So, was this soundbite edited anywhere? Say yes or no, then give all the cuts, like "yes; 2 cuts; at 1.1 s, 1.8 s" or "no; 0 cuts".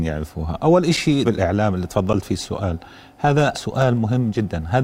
yes; 2 cuts; at 1.3 s, 3.5 s